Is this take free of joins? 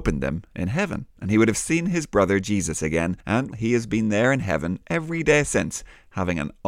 no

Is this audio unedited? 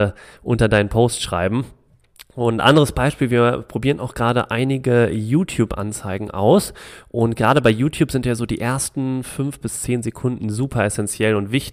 yes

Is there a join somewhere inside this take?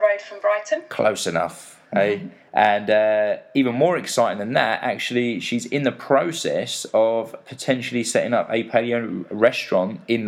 no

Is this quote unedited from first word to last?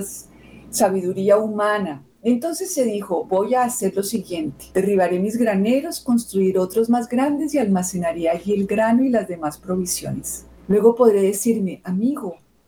no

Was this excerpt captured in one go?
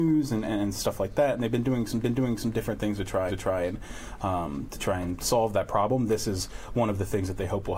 no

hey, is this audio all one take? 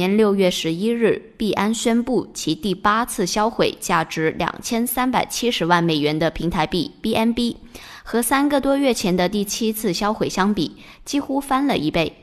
yes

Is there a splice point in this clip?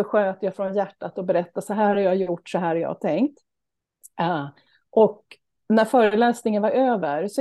no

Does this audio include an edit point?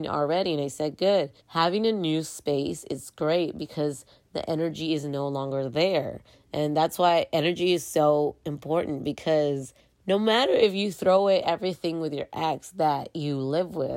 yes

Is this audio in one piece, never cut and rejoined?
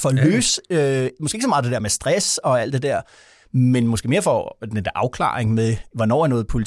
yes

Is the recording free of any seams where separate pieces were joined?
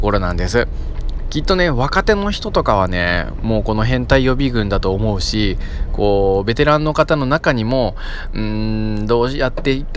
yes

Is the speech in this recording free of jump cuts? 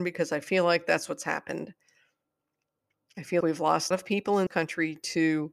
no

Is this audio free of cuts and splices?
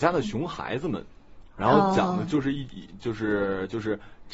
yes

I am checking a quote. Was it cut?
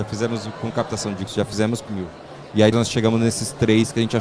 yes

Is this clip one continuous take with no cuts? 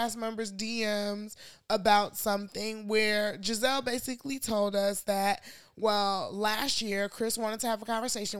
yes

